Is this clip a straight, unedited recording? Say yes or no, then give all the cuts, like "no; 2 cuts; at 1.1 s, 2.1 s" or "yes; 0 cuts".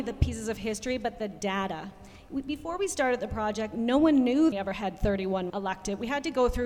no; 2 cuts; at 4.5 s, 5.5 s